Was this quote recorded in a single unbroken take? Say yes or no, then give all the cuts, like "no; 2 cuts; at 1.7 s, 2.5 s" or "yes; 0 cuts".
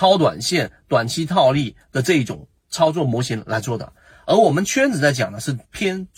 yes; 0 cuts